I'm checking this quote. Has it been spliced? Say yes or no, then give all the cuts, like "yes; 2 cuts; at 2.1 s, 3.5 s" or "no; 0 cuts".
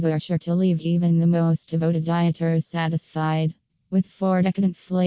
no; 0 cuts